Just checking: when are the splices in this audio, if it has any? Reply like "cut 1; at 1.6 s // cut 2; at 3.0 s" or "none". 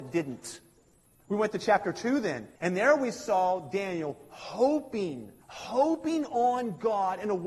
cut 1; at 2.6 s // cut 2; at 5.4 s